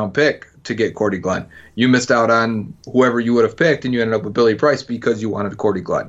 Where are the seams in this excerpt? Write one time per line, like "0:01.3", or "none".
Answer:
none